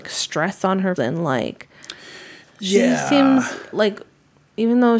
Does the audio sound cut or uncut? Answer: cut